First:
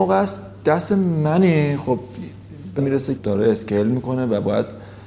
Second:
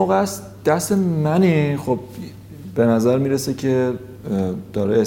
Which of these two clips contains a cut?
first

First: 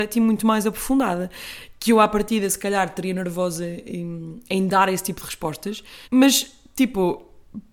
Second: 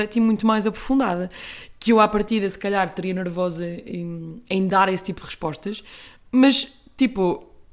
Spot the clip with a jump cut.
first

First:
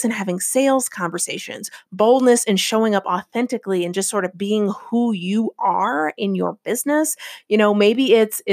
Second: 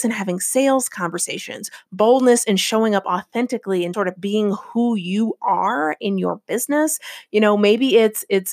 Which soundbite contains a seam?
second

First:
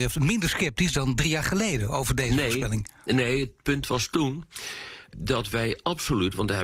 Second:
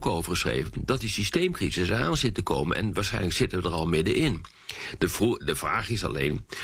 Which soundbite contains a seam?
first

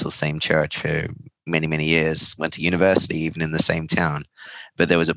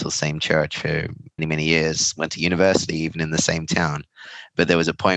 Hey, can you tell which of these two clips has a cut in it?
second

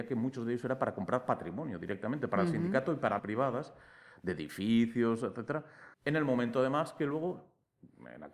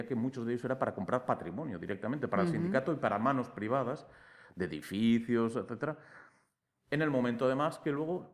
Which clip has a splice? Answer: first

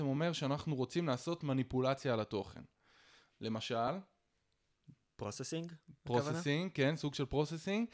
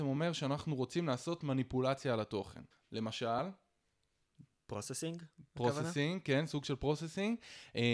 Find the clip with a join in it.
second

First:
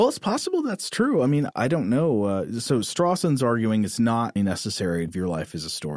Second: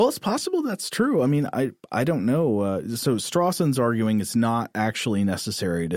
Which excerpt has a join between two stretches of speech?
first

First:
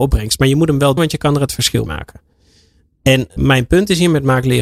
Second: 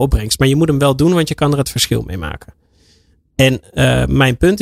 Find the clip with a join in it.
first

